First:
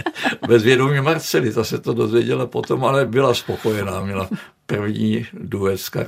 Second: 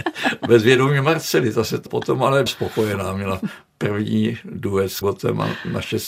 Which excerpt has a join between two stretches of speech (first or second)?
second